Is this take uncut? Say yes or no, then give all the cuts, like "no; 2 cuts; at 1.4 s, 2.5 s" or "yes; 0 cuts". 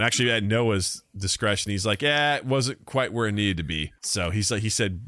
no; 1 cut; at 4.0 s